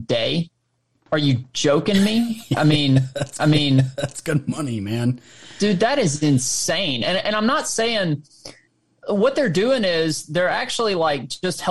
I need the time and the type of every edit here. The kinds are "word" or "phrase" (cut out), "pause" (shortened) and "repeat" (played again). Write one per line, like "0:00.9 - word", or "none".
0:03.4 - repeat